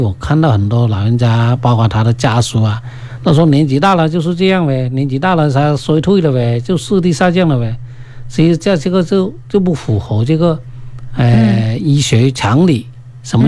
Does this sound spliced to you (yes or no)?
no